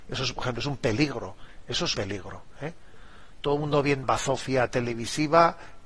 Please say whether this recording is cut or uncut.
cut